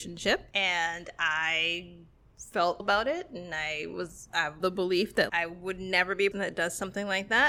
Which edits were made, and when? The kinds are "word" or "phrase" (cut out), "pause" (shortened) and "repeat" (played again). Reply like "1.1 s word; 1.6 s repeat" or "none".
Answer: 2.8 s word; 4.6 s word; 5.3 s word; 6.3 s word